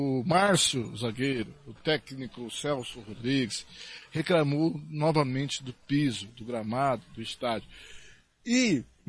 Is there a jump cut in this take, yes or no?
no